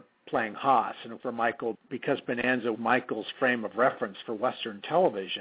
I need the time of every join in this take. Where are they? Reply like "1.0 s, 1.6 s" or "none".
1.2 s, 1.7 s, 2.7 s